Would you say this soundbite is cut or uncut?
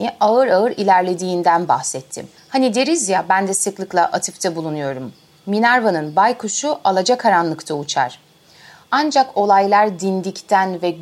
uncut